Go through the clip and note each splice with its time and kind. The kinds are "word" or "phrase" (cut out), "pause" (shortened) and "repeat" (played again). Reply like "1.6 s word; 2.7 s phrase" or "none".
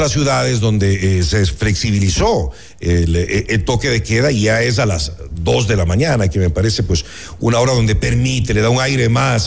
none